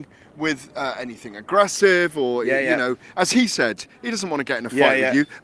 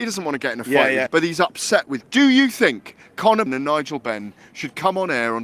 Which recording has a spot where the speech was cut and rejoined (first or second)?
second